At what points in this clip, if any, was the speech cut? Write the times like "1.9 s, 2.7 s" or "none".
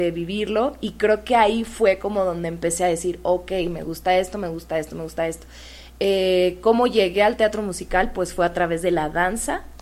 none